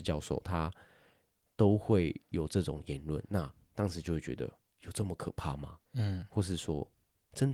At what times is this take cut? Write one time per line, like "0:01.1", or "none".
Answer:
0:03.6
0:05.8